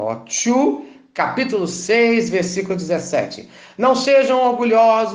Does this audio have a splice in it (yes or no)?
no